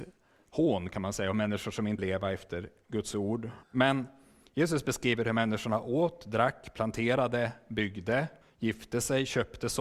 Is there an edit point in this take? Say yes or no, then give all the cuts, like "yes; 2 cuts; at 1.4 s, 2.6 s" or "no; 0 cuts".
yes; 3 cuts; at 2.0 s, 3.6 s, 8.4 s